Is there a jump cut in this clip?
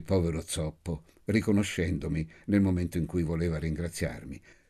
no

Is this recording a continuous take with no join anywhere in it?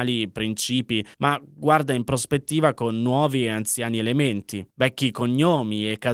no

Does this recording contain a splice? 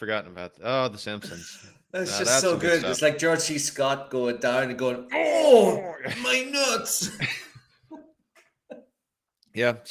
no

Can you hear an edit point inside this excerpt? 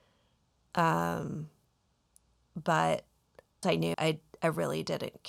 yes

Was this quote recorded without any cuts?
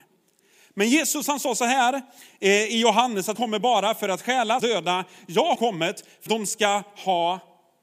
no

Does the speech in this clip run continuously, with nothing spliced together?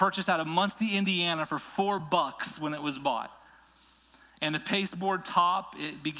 yes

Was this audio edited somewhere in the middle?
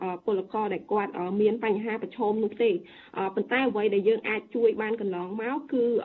no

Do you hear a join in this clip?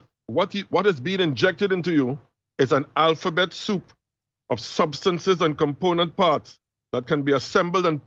no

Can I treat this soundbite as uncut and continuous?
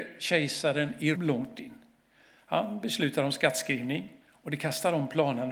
no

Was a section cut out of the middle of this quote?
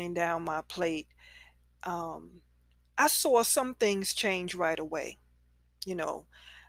no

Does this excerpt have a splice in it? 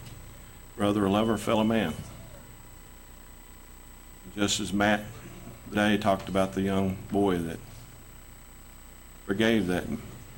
yes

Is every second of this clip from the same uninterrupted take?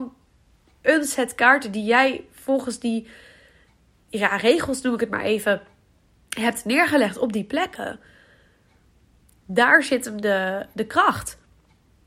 yes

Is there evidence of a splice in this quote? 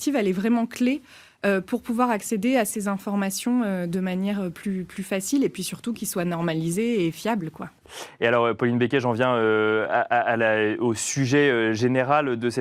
no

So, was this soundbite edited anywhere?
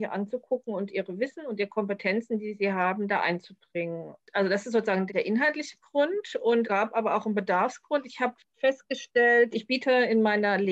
yes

